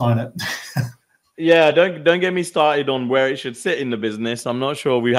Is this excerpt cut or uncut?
uncut